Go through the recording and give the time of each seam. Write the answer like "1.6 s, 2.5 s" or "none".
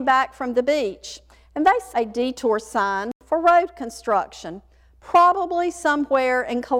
1.9 s